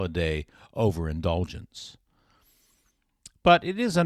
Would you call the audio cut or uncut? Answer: uncut